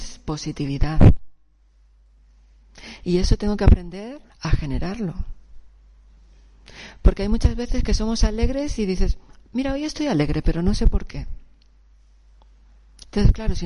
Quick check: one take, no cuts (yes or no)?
no